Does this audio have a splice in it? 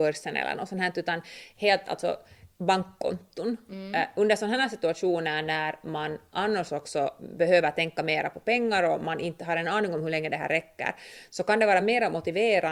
no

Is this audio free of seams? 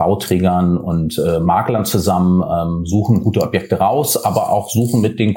yes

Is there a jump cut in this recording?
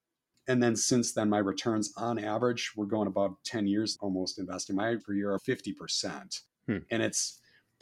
yes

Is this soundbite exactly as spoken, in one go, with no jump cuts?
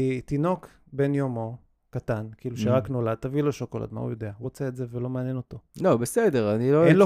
no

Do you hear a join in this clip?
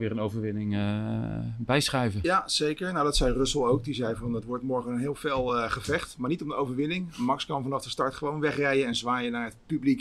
no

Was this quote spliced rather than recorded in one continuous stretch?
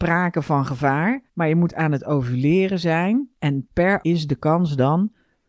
yes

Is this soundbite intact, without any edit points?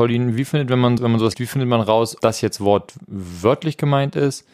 no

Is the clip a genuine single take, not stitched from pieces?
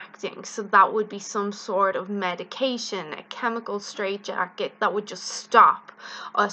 yes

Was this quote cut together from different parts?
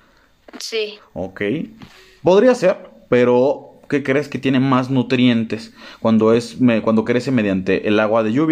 no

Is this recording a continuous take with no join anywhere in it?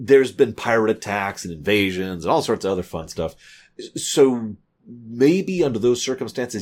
yes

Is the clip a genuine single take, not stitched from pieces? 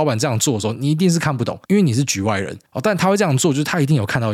no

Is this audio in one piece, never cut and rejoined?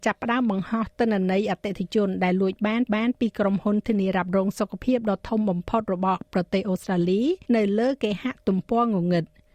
no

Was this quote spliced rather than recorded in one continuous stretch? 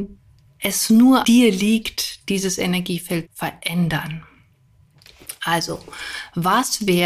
yes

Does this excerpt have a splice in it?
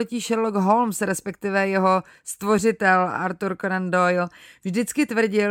no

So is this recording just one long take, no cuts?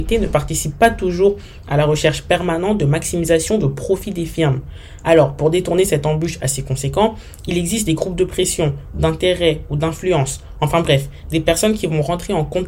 yes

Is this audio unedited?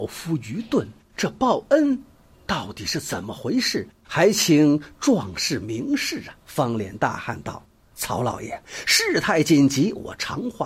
no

